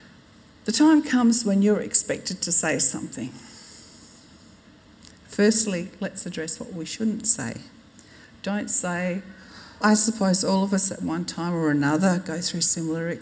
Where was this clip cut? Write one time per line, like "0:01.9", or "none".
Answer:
0:09.8